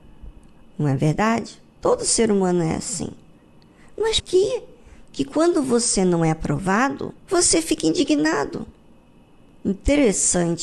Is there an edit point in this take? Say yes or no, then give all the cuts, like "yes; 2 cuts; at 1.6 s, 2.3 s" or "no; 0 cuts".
yes; 2 cuts; at 4.2 s, 7.2 s